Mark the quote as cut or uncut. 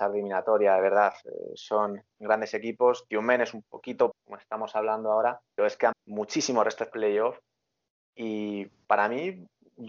cut